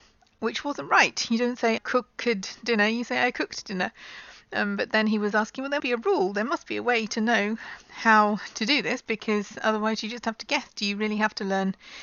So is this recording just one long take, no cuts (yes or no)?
no